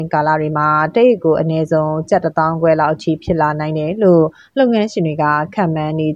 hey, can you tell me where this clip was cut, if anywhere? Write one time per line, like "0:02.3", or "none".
none